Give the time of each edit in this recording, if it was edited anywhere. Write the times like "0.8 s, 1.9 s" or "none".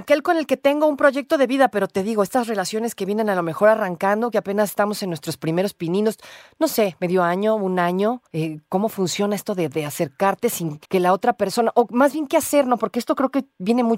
8.3 s, 10.8 s